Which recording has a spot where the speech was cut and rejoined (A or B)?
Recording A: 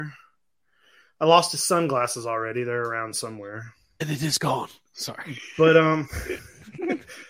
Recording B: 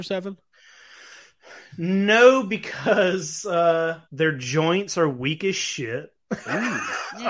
B